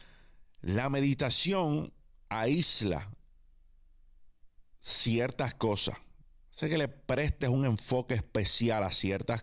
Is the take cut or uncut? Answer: uncut